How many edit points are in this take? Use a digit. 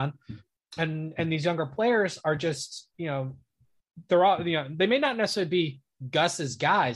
0